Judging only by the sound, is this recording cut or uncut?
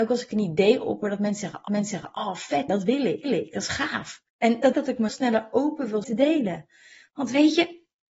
cut